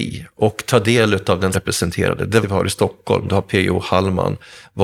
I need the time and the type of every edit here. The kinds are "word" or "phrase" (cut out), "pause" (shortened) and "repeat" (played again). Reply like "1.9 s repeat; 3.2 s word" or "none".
1.5 s phrase; 2.4 s word